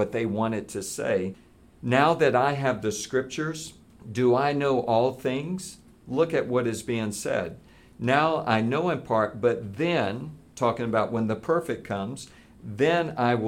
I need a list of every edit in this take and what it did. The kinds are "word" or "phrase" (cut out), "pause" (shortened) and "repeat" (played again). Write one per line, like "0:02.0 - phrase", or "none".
none